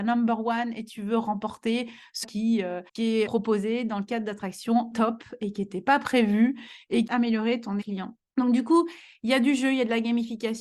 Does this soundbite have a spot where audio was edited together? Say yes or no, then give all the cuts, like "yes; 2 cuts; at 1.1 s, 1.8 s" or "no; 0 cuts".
yes; 7 cuts; at 2.2 s, 2.9 s, 3.3 s, 4.9 s, 7.1 s, 7.8 s, 8.3 s